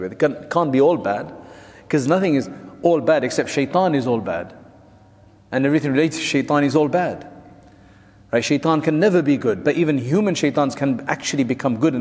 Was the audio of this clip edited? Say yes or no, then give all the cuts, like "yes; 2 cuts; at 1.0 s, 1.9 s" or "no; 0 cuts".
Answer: no; 0 cuts